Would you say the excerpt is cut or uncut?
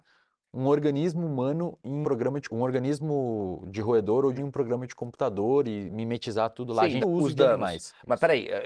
cut